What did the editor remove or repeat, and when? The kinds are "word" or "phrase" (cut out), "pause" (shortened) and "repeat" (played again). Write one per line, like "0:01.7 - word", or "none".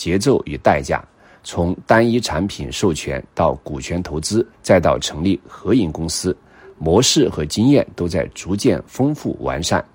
0:04.5 - pause